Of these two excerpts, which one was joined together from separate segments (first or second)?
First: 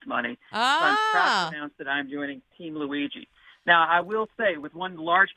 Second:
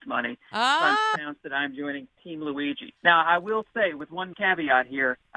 second